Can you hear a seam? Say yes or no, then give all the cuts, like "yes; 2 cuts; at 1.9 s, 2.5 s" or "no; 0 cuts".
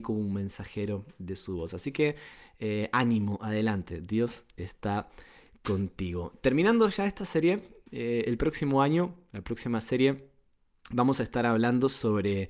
no; 0 cuts